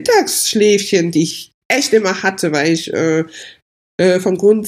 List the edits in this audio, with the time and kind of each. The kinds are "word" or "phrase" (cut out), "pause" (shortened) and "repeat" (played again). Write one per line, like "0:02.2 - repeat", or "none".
0:01.6 - pause